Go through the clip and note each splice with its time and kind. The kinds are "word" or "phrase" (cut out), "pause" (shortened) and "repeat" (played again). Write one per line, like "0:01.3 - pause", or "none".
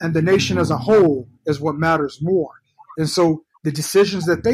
0:01.4 - pause